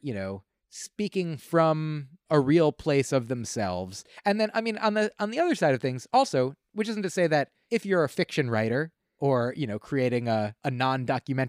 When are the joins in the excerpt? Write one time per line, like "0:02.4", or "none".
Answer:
none

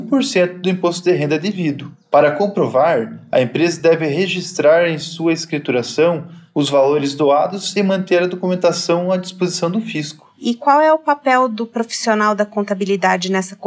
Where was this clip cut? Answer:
none

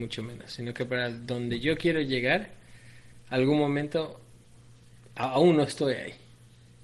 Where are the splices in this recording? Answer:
none

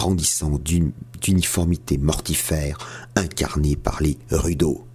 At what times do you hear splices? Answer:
none

